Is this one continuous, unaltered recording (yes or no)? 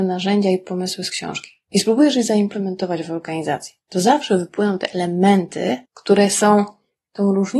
no